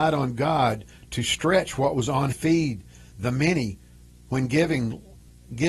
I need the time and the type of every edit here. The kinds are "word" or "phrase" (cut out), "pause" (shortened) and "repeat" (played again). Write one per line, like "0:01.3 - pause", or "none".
0:02.3 - phrase